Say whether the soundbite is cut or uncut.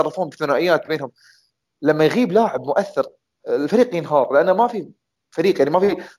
uncut